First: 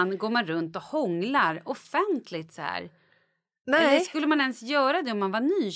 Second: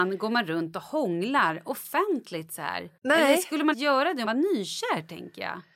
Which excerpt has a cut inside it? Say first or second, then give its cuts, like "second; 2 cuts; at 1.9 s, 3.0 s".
second; 3 cuts; at 3.0 s, 3.7 s, 4.3 s